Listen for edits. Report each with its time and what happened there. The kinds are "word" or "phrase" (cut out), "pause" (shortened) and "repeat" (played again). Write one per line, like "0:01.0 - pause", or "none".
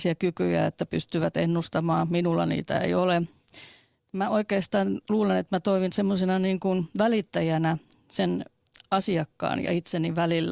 none